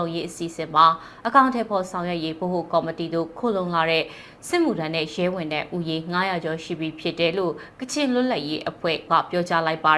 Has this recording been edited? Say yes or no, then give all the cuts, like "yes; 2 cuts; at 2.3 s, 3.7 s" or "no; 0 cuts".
yes; 1 cut; at 9.1 s